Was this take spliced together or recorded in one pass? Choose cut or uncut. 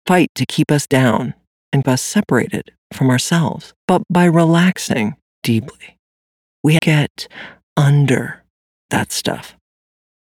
cut